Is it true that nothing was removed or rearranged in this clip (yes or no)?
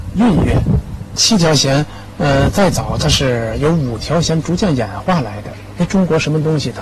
yes